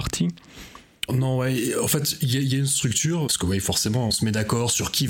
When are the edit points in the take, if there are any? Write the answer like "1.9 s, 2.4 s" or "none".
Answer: 1.1 s, 3.3 s, 4.1 s